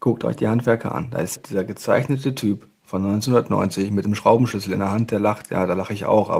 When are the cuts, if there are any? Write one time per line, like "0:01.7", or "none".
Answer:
0:01.4